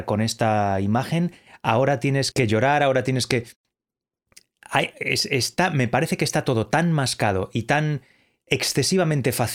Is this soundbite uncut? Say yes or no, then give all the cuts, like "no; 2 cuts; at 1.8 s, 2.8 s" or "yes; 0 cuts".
no; 1 cut; at 2.3 s